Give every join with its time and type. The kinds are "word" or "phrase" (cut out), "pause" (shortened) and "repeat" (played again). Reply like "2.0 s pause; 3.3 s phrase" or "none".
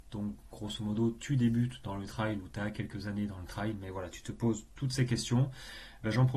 none